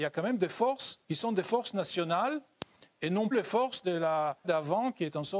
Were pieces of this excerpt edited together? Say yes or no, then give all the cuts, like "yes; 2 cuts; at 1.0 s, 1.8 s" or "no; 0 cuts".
yes; 3 cuts; at 1.0 s, 3.3 s, 4.4 s